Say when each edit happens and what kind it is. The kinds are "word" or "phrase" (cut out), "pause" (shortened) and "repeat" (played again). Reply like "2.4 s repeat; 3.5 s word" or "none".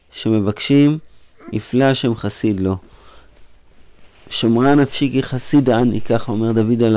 none